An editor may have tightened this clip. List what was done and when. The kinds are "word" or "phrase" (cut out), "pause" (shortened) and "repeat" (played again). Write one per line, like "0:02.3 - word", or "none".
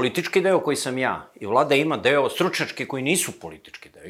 none